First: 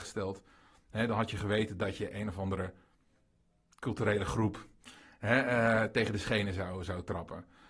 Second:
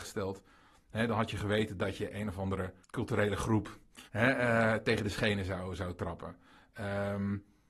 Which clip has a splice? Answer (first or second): second